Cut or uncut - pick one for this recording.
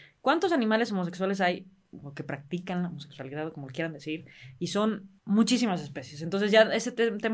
cut